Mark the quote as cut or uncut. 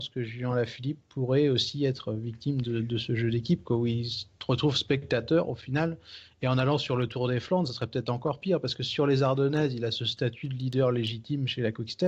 uncut